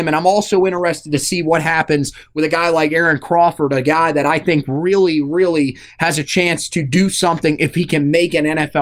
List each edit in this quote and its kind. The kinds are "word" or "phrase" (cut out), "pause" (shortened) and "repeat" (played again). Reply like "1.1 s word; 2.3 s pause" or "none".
none